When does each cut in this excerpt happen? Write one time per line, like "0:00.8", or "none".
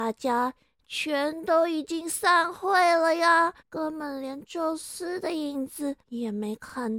0:03.6
0:06.0